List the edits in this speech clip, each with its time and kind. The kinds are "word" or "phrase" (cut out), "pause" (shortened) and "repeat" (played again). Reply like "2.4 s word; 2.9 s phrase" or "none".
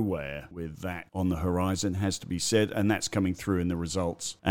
none